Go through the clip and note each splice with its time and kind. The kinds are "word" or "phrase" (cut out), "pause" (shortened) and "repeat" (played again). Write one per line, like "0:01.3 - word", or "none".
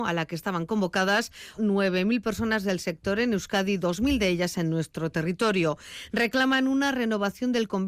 0:01.6 - word